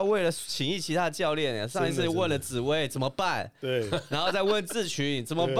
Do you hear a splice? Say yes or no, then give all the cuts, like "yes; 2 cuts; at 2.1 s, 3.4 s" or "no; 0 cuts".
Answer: no; 0 cuts